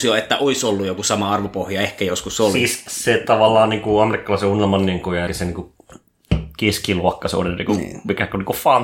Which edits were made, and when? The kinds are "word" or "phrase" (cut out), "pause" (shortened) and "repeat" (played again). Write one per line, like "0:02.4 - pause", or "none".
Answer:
0:02.9 - word
0:05.3 - word